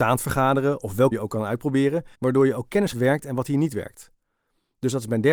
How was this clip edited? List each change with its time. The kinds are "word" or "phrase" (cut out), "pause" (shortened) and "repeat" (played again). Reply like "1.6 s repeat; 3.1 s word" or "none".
1.1 s word; 2.1 s pause; 2.9 s phrase